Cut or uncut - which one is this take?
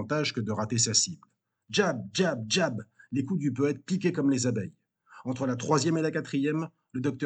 uncut